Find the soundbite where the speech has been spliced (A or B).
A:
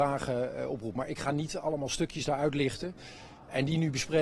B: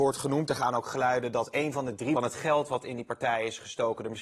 B